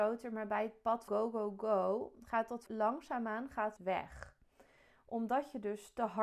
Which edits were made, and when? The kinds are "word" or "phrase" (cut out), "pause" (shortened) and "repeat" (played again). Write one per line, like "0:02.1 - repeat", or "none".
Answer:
0:01.1 - word
0:02.7 - word
0:03.8 - word